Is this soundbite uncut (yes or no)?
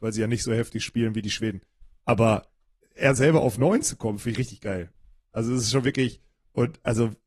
yes